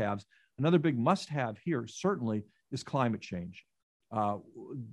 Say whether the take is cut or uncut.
uncut